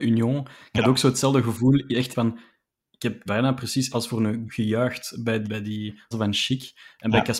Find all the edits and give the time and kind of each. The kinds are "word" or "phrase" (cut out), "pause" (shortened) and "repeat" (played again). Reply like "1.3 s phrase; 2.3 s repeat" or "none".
2.1 s word; 3.3 s word; 3.9 s word; 4.5 s word; 5.4 s word; 6.1 s word